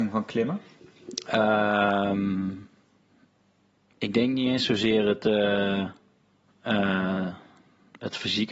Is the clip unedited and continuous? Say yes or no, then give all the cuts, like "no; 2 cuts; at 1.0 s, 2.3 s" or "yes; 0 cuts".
yes; 0 cuts